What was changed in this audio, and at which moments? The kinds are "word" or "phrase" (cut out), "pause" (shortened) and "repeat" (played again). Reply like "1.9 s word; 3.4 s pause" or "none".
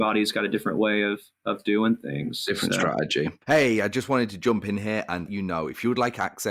5.3 s word